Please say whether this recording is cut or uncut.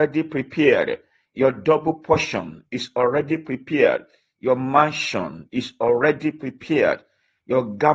uncut